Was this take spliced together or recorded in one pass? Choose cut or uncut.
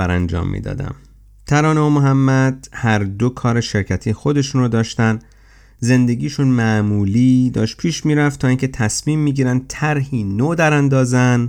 uncut